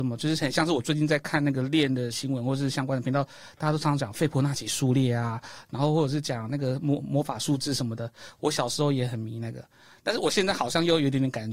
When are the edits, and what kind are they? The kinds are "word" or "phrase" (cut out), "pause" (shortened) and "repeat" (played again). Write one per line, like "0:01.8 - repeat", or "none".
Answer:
none